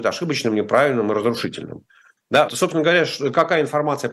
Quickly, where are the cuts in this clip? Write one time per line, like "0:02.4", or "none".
0:02.5